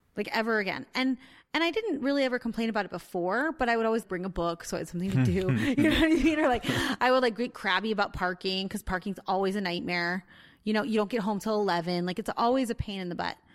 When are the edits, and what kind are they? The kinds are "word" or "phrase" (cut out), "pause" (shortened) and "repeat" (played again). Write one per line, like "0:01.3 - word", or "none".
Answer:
none